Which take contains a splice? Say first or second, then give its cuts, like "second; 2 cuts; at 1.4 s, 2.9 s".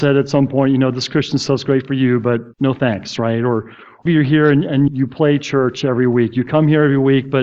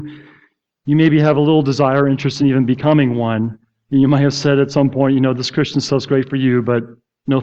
first; 3 cuts; at 2.5 s, 4.1 s, 4.9 s